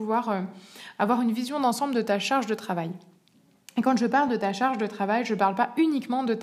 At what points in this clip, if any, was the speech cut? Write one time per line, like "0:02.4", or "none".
none